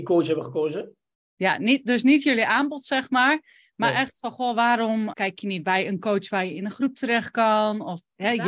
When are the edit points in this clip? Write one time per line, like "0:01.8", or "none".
0:05.1

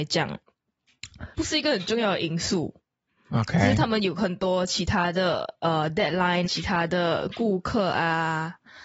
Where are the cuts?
0:01.3
0:06.4

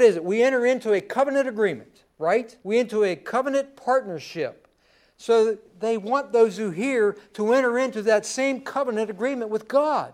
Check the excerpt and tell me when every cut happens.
0:02.6

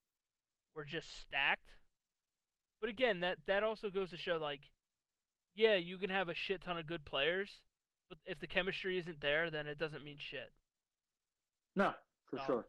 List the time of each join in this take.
none

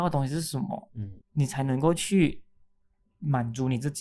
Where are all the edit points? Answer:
0:01.2

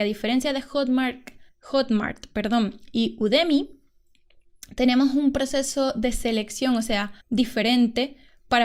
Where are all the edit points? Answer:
0:01.5
0:07.2

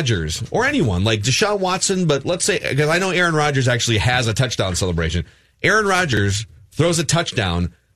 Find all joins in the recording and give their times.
none

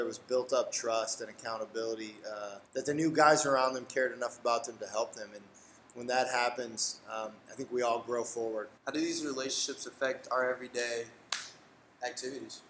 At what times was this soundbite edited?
0:02.7
0:08.8

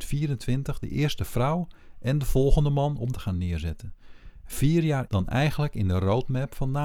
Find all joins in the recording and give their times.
0:03.1
0:05.1

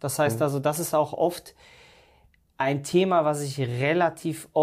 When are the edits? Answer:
none

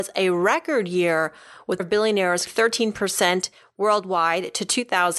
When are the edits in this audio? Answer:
0:01.8
0:02.5

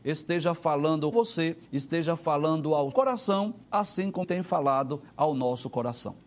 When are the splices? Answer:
0:01.1
0:01.7
0:02.9
0:03.6
0:04.2
0:05.1

